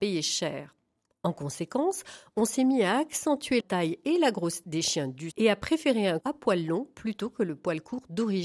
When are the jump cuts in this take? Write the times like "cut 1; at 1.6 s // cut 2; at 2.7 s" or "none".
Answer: cut 1; at 3.6 s // cut 2; at 4.6 s // cut 3; at 5.3 s // cut 4; at 6.2 s